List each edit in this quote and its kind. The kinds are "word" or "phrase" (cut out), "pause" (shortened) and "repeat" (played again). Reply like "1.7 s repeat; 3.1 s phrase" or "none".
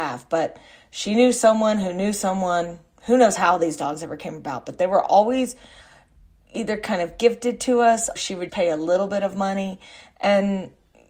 8.2 s word; 8.5 s word